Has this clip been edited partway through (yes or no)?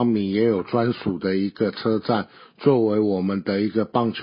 no